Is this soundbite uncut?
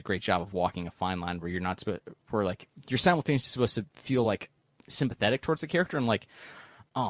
yes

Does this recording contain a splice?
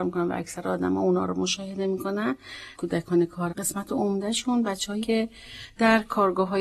yes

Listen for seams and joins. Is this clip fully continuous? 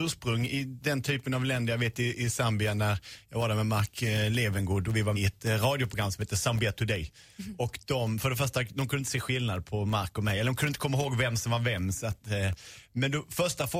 no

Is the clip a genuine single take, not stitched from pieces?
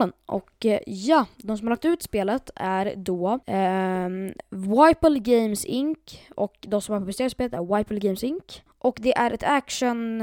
no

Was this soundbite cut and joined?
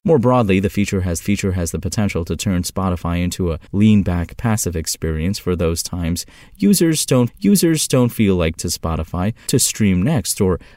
yes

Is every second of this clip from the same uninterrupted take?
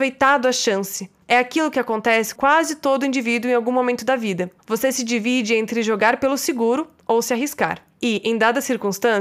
no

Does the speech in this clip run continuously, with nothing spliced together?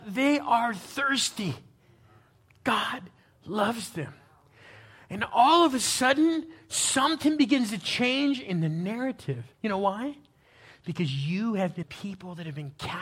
no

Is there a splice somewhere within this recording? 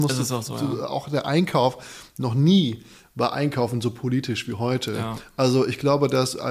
no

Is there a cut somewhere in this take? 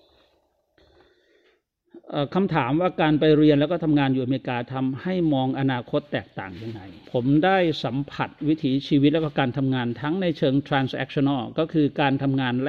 yes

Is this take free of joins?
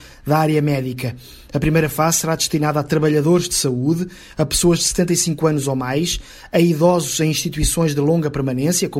yes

